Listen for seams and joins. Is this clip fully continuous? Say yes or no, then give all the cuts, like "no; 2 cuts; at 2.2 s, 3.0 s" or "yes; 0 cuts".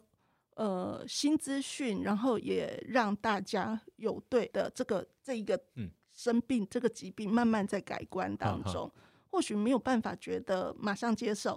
no; 1 cut; at 4.5 s